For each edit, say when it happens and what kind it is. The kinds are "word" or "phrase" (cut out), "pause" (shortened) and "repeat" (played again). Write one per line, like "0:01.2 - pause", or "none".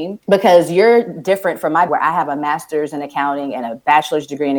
0:01.9 - word